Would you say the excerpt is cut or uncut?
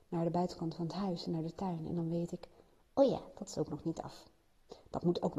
uncut